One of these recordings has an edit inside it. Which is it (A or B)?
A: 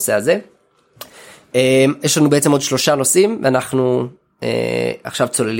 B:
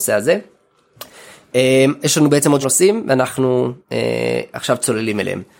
B